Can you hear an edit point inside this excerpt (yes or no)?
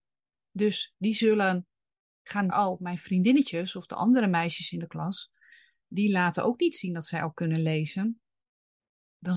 yes